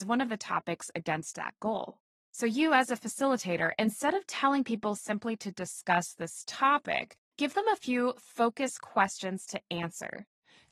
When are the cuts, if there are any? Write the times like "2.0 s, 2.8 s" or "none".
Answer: 2.2 s